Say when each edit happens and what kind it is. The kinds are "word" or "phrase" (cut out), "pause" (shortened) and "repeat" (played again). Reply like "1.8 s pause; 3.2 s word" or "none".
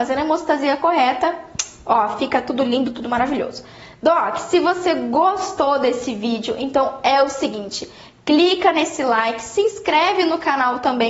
none